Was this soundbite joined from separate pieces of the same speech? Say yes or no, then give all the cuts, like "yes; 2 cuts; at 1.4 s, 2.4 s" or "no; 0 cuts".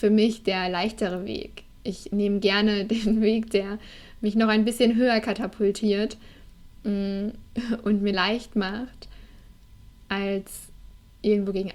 yes; 1 cut; at 8.1 s